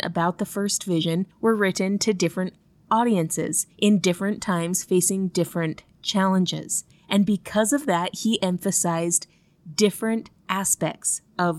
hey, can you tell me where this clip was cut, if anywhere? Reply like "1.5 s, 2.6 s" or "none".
1.3 s, 3.7 s, 6.9 s, 10.4 s